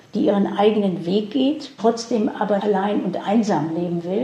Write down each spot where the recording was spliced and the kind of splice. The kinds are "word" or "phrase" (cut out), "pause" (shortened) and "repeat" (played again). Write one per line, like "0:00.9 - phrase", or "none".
0:01.8 - word
0:02.6 - word